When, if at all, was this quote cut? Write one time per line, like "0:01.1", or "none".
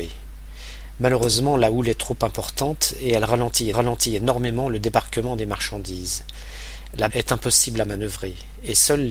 0:03.7
0:07.1